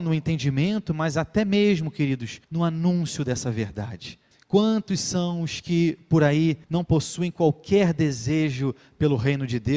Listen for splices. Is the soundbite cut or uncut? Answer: cut